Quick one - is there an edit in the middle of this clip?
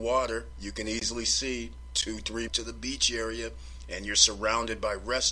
yes; 1 cut; at 2.5 s

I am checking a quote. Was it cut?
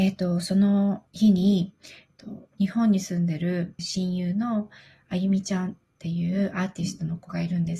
yes; 3 cuts; at 1.1 s, 2.1 s, 3.8 s

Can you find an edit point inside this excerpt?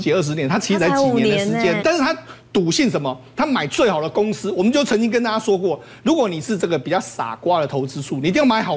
yes; 1 cut; at 1.8 s

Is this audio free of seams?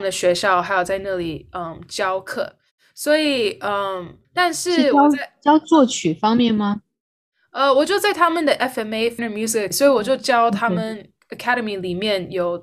no; 3 cuts; at 4.2 s, 9.2 s, 9.7 s

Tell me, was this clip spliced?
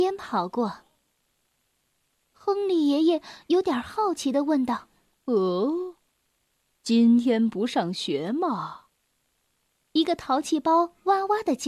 no; 0 cuts

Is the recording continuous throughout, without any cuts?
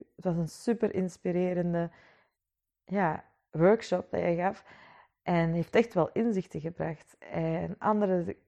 yes; 0 cuts

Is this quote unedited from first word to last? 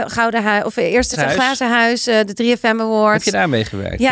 no; 1 cut; at 1.1 s

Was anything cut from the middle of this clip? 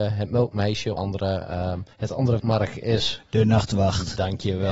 yes; 3 cuts; at 1.0 s, 1.9 s, 2.4 s

